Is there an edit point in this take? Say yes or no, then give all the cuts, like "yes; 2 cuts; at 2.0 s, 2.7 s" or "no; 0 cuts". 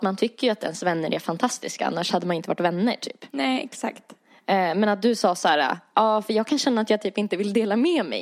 no; 0 cuts